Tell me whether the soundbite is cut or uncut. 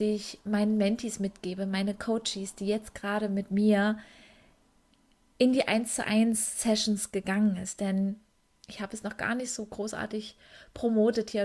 uncut